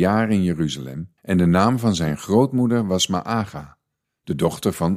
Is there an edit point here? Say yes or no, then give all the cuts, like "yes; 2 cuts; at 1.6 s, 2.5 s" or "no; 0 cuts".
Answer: yes; 1 cut; at 1.2 s